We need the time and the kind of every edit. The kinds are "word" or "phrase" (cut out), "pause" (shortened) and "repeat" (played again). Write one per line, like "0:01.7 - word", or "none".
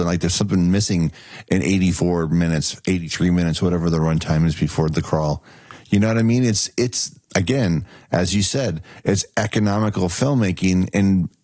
0:07.2 - pause

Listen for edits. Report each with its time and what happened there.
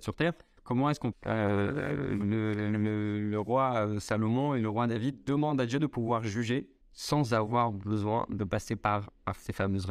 0:01.1 - phrase
0:06.8 - pause

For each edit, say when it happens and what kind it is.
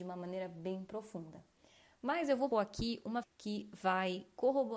0:02.5 - word
0:03.2 - word

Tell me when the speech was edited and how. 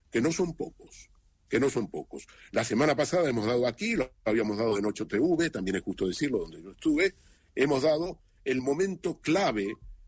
none

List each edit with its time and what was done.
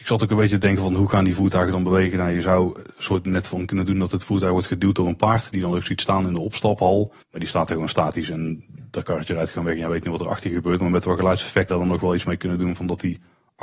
0:07.2 - pause
0:11.7 - phrase

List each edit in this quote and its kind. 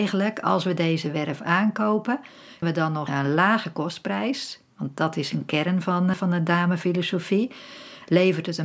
0:02.6 - word
0:03.1 - phrase
0:06.1 - word

